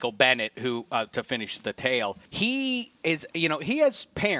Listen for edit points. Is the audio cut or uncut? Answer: cut